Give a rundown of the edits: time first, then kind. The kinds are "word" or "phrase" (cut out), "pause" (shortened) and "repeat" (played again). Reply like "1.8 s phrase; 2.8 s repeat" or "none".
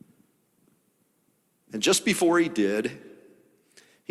none